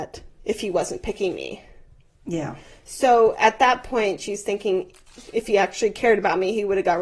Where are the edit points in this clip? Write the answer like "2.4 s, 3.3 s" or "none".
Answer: none